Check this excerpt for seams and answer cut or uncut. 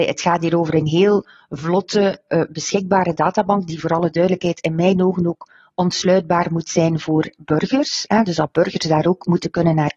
uncut